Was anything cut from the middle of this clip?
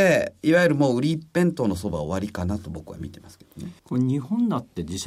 yes; 1 cut; at 3.8 s

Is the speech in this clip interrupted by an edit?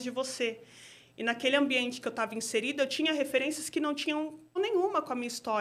yes; 1 cut; at 4.6 s

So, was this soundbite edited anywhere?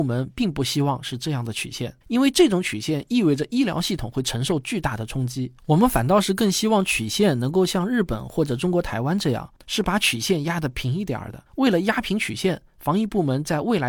yes; 4 cuts; at 2.0 s, 5.6 s, 9.6 s, 11.5 s

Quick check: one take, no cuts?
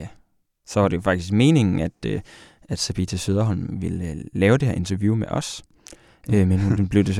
yes; 0 cuts

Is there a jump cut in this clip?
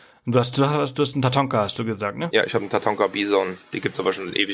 no; 0 cuts

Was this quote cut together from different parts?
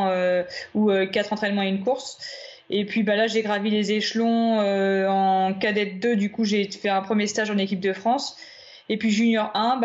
no; 0 cuts

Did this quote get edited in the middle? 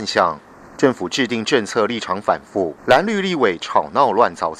yes; 1 cut; at 2.8 s

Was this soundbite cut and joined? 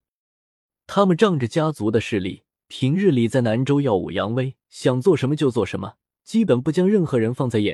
yes; 3 cuts; at 2.5 s, 4.6 s, 6.2 s

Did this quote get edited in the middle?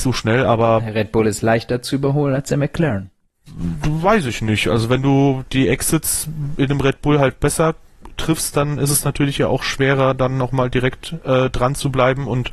no; 0 cuts

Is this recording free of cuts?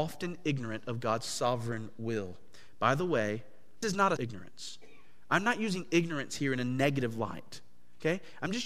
no; 2 cuts; at 3.8 s, 4.2 s

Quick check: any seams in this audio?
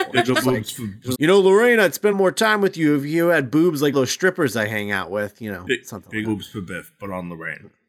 yes; 4 cuts; at 1.1 s, 2.1 s, 3.9 s, 6.2 s

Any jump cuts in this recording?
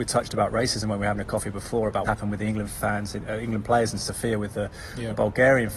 yes; 1 cut; at 2.0 s

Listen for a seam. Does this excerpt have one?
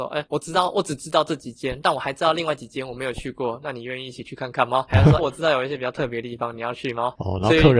yes; 1 cut; at 5.2 s

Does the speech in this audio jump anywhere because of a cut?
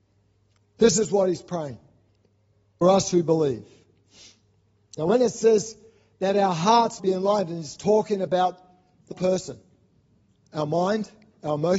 yes; 3 cuts; at 2.8 s, 7.0 s, 9.1 s

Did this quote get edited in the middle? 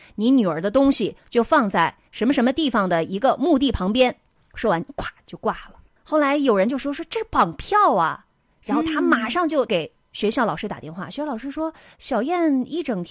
yes; 1 cut; at 2.0 s

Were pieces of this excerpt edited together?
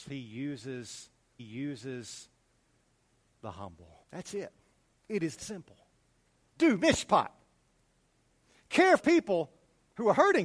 yes; 5 cuts; at 1.4 s, 4.0 s, 4.9 s, 5.4 s, 9.0 s

